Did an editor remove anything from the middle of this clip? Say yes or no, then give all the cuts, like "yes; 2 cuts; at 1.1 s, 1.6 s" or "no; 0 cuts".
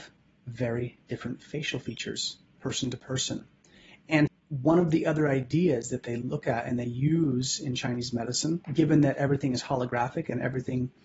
yes; 2 cuts; at 4.3 s, 8.6 s